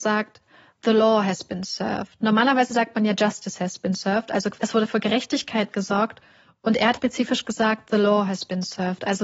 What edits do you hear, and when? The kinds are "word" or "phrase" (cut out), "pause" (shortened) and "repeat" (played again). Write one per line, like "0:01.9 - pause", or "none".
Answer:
0:06.9 - word